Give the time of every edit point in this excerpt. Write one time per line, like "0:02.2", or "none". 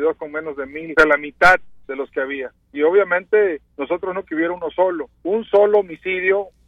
0:00.9
0:01.8
0:03.7
0:04.2
0:05.1